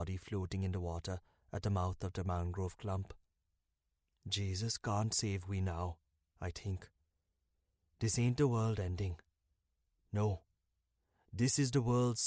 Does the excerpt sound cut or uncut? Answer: uncut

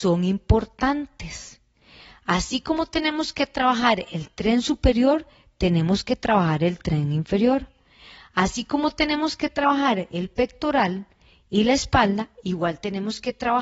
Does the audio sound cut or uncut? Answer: uncut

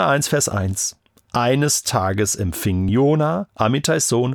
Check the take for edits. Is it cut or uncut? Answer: uncut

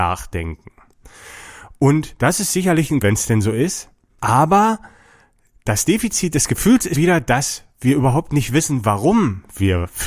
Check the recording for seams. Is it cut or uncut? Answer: cut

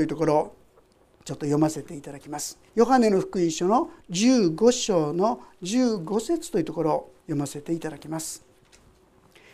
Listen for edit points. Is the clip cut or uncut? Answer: cut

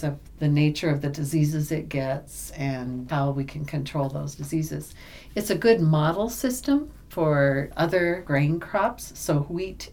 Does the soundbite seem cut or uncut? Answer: uncut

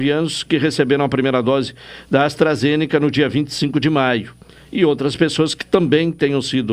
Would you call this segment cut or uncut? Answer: uncut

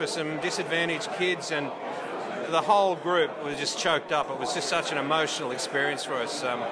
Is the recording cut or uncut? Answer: uncut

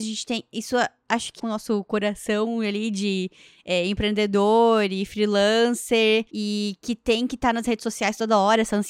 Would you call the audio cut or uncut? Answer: cut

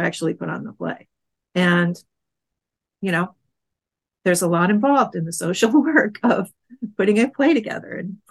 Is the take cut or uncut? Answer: uncut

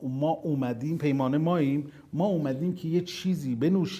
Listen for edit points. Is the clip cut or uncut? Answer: uncut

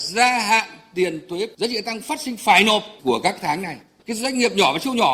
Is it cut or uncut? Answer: uncut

